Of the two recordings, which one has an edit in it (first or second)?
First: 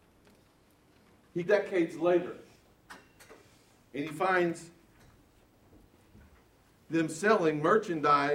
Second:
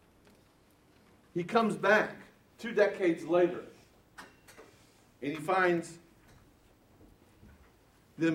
first